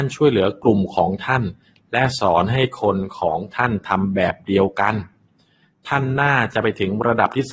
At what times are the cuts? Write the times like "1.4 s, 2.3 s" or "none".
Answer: none